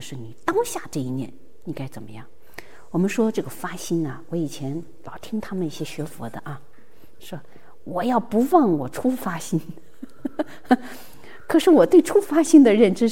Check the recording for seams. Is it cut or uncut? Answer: cut